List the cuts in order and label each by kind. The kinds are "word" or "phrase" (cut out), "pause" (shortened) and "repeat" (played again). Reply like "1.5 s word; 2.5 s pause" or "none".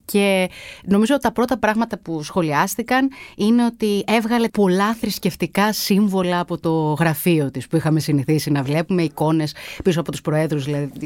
4.5 s word